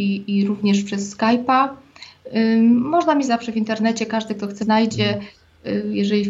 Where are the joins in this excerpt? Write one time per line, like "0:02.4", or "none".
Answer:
0:03.3
0:04.6